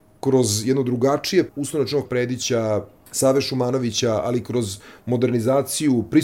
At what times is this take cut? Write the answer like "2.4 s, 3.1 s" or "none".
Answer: 1.5 s, 2.1 s